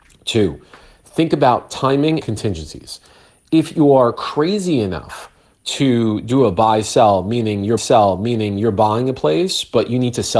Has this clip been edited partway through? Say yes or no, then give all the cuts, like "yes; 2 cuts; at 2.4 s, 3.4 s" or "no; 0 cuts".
yes; 2 cuts; at 2.2 s, 7.8 s